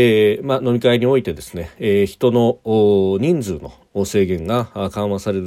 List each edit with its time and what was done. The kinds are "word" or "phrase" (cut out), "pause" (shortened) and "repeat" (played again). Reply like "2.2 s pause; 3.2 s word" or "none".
none